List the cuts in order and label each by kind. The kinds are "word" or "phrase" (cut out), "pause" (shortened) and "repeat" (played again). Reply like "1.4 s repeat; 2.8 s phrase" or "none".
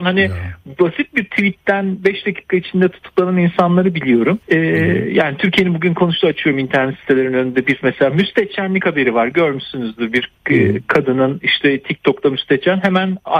4.4 s pause